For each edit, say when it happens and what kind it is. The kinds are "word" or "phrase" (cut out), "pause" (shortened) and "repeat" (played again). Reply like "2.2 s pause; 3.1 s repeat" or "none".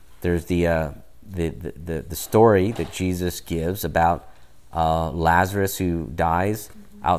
none